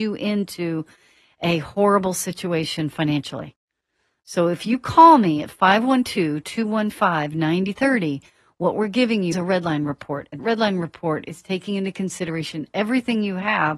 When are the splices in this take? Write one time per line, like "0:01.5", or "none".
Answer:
0:09.3
0:10.4